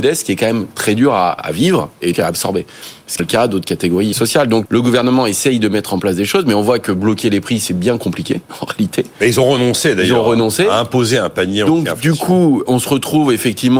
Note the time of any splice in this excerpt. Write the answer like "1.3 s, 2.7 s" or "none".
1.4 s, 2.1 s, 3.2 s, 4.1 s, 4.7 s, 12.7 s